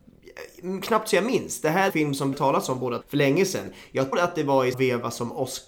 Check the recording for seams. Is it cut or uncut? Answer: cut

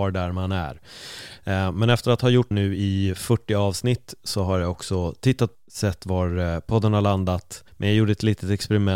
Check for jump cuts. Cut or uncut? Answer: cut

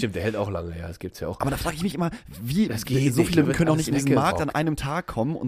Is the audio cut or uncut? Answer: cut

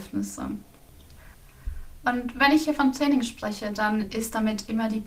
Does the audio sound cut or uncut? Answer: uncut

